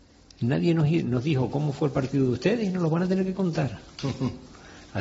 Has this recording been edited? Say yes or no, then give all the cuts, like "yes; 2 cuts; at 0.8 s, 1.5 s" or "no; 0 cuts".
no; 0 cuts